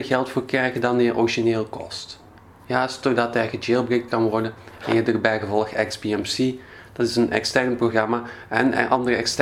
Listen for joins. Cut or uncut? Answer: uncut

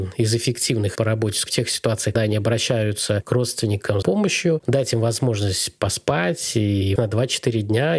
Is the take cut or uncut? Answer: cut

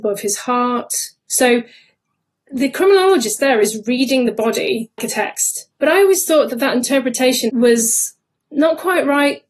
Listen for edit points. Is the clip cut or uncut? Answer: cut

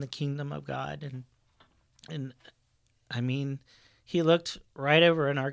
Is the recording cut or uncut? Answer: uncut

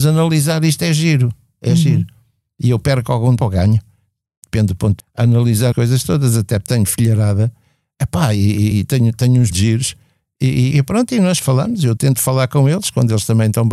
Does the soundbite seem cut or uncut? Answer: cut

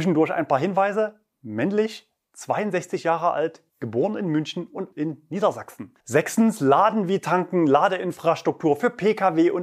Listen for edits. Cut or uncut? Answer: cut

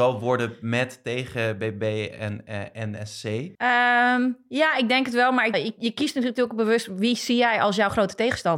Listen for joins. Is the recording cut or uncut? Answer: cut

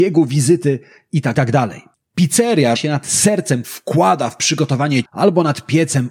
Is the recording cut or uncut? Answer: cut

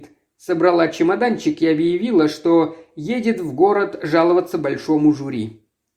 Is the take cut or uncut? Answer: uncut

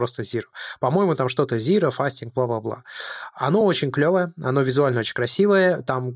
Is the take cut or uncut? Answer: uncut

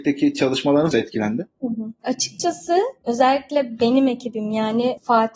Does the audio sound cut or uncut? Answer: cut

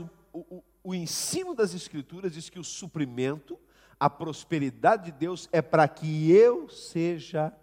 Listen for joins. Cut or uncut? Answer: uncut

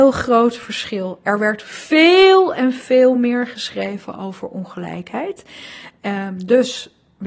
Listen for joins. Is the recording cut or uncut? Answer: uncut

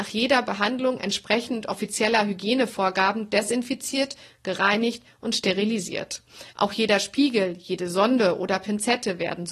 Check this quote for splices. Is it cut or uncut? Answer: cut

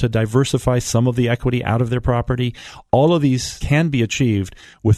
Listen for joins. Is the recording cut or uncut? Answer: cut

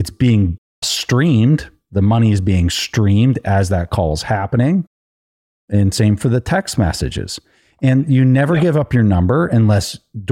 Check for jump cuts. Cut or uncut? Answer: uncut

